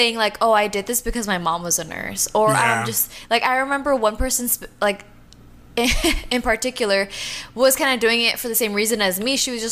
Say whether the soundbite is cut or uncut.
uncut